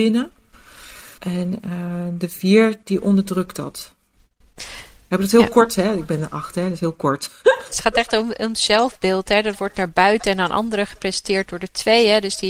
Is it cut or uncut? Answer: cut